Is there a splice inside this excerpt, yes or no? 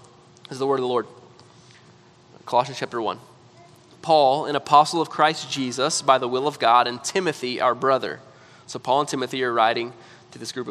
no